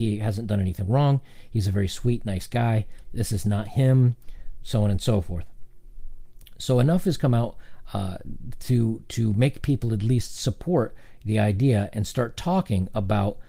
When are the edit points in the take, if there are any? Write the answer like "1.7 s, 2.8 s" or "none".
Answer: none